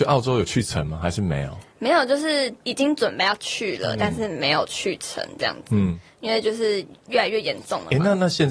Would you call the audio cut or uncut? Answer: cut